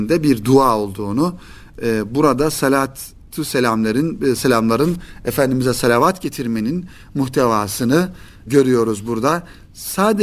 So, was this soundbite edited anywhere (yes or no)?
no